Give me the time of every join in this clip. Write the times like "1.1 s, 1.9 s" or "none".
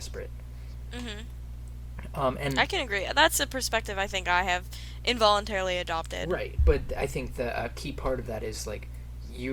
none